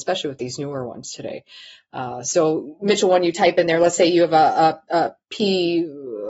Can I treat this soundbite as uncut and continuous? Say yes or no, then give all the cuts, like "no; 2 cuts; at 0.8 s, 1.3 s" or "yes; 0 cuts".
yes; 0 cuts